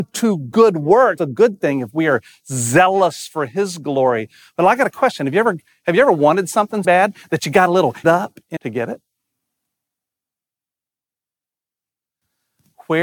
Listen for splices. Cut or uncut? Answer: cut